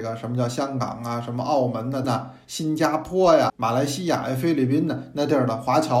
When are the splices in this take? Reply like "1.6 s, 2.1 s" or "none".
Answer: 2.0 s, 3.5 s